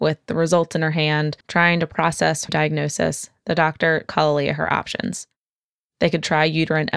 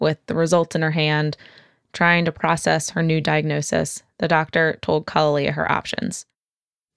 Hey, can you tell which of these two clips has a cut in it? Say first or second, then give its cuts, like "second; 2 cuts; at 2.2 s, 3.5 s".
first; 3 cuts; at 1.4 s, 2.5 s, 4.1 s